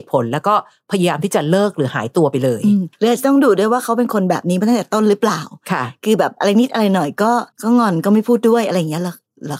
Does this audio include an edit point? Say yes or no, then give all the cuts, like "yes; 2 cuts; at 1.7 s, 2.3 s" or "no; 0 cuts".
yes; 2 cuts; at 2.9 s, 7.5 s